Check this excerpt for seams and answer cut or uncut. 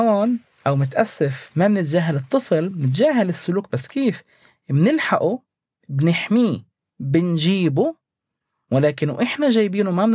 uncut